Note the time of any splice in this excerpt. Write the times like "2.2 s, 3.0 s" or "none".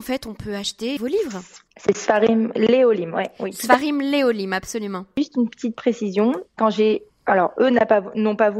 1.0 s, 1.7 s

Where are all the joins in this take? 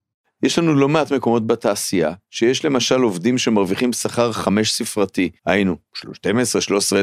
2.2 s, 5.4 s

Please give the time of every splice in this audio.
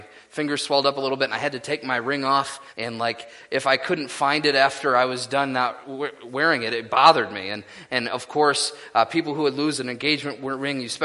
2.7 s

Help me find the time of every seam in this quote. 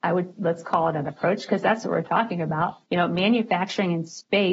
1.0 s, 2.8 s

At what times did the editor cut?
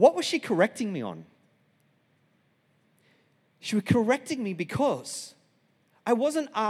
none

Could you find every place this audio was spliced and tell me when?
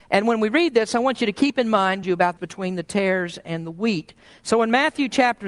2.0 s, 2.4 s

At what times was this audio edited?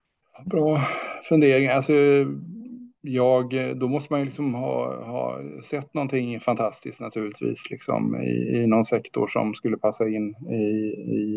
3.0 s

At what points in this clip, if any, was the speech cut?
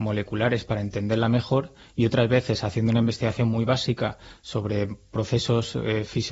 none

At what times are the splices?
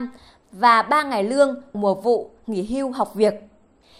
1.7 s

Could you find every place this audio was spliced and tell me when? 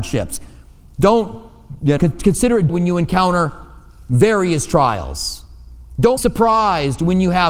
2.0 s, 2.7 s, 6.2 s

